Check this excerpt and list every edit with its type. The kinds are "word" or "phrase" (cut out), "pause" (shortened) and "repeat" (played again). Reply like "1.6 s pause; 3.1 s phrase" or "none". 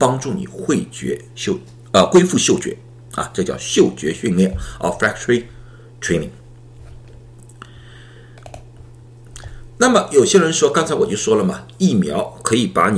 none